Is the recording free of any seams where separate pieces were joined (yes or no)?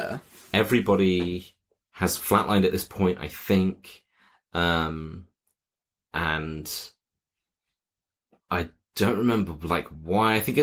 yes